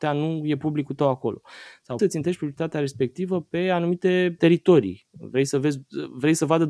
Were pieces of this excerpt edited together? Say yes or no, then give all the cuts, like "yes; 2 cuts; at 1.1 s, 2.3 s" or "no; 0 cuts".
yes; 2 cuts; at 2.0 s, 4.4 s